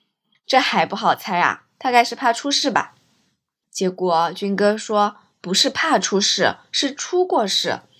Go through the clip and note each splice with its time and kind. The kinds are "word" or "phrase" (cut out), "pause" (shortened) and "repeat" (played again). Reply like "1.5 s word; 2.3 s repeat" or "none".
none